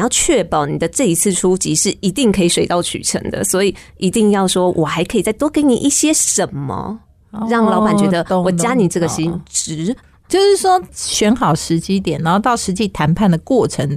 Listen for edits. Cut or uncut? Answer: uncut